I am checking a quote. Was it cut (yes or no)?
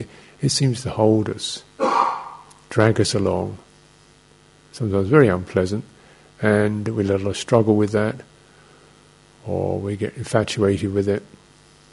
no